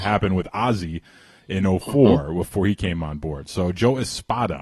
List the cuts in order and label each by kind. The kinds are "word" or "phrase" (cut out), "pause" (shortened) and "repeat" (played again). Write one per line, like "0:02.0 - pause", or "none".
none